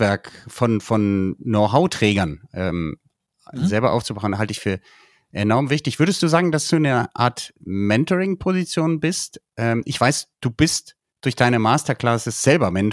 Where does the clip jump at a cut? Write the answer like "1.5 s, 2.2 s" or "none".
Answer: none